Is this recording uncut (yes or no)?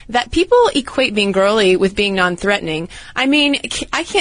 yes